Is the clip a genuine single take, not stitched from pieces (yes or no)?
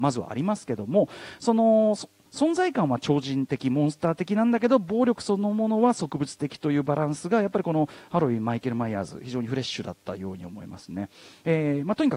yes